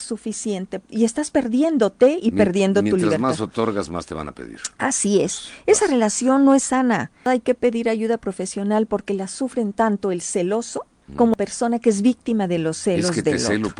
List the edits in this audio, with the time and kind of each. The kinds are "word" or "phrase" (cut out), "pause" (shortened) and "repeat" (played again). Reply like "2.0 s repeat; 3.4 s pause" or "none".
11.1 s word